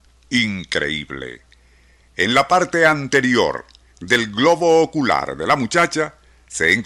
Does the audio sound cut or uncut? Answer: uncut